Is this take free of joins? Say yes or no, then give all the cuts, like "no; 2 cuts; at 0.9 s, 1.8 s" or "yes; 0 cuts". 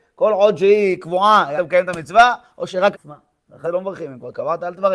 no; 3 cuts; at 1.6 s, 2.9 s, 3.6 s